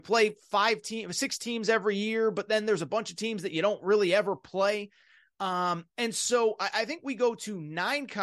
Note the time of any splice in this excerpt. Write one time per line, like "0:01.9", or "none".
none